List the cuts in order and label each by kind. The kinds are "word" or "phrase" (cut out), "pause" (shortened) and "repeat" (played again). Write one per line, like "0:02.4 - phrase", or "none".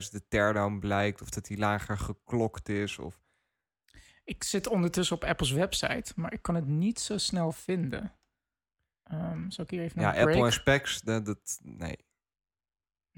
none